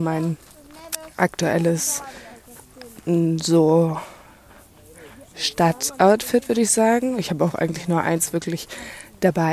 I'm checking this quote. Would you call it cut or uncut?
uncut